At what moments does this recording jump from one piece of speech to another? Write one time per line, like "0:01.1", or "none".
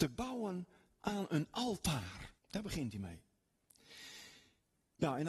0:02.4